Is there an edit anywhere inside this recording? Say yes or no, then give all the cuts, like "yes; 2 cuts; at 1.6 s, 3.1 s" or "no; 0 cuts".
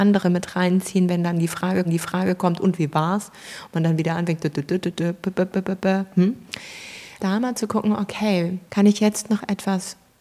yes; 3 cuts; at 1.8 s, 7.2 s, 8.7 s